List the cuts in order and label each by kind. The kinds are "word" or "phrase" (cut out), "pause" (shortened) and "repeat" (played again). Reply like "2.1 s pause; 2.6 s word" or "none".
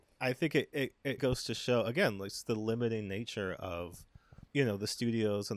1.2 s word; 4.5 s pause